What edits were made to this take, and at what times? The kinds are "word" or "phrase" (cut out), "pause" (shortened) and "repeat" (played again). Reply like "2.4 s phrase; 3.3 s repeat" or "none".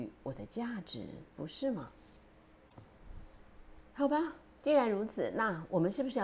1.3 s pause